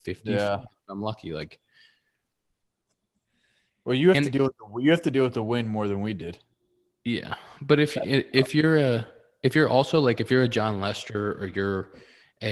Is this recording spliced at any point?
no; 0 cuts

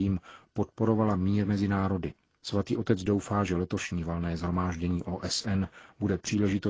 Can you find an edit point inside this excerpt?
no; 0 cuts

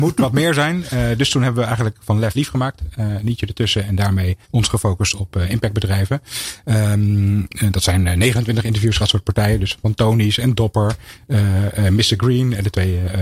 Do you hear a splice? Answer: yes; 4 cuts; at 2.3 s, 4.4 s, 5.2 s, 9.0 s

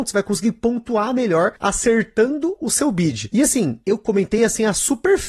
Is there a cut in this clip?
no; 0 cuts

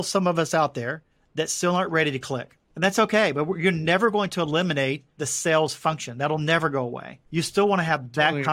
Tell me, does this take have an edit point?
yes; 4 cuts; at 1.1 s, 2.6 s, 5.1 s, 7.3 s

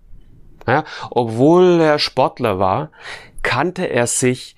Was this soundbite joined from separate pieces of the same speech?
no; 0 cuts

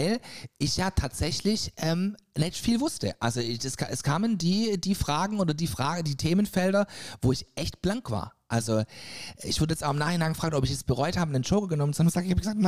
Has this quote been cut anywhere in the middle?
no; 0 cuts

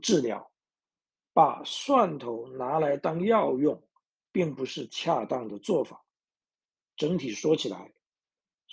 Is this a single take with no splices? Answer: yes; 0 cuts

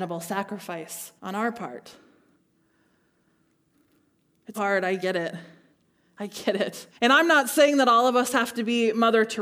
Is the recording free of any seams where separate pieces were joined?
no; 3 cuts; at 1.2 s, 4.6 s, 6.9 s

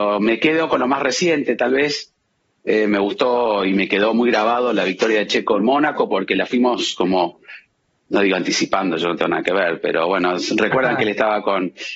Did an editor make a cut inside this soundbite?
no; 0 cuts

